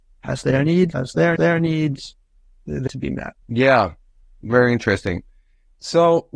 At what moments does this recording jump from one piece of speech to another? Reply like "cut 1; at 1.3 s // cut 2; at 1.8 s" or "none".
cut 1; at 0.9 s // cut 2; at 1.4 s // cut 3; at 2.9 s // cut 4; at 3.4 s